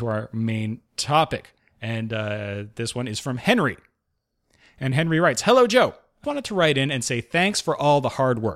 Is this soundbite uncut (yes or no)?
no